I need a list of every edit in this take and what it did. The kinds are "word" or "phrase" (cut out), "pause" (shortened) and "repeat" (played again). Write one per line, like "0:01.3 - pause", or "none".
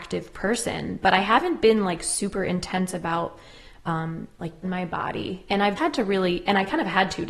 0:04.6 - phrase
0:05.8 - word